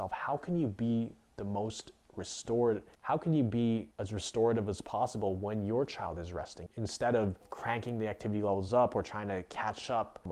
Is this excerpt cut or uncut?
uncut